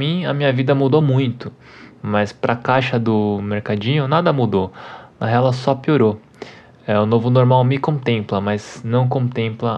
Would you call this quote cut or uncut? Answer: uncut